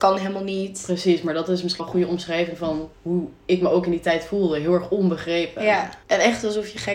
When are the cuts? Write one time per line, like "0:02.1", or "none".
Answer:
0:01.8
0:02.9
0:06.0